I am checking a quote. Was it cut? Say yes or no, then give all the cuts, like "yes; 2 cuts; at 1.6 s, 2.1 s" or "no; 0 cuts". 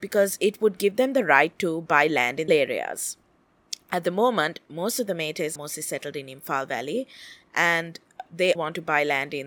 yes; 3 cuts; at 2.5 s, 5.6 s, 8.6 s